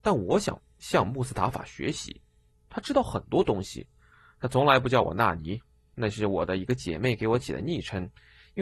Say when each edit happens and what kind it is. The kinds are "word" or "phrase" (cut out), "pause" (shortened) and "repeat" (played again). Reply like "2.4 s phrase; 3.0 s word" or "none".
none